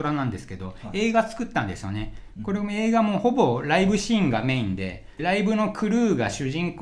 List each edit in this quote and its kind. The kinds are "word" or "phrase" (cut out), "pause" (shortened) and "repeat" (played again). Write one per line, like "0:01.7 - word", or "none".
0:05.2 - word